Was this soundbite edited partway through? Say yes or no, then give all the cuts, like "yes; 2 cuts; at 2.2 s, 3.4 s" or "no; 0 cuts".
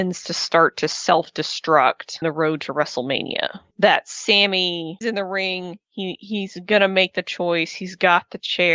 yes; 2 cuts; at 2.2 s, 5.0 s